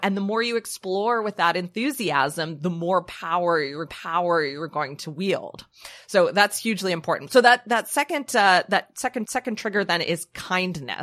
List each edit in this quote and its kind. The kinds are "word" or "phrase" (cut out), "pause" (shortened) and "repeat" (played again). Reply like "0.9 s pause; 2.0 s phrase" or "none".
3.9 s repeat; 9.3 s repeat